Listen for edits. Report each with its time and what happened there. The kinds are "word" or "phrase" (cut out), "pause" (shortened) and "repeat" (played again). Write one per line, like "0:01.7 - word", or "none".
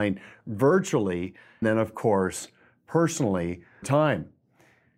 0:01.6 - word
0:03.8 - word